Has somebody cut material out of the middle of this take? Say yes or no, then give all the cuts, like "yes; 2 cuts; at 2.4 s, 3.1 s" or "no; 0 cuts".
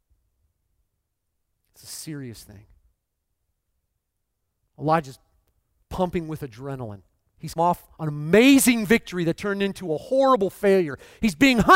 yes; 2 cuts; at 7.6 s, 8.0 s